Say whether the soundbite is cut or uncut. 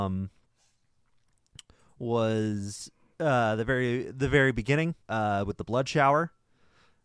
cut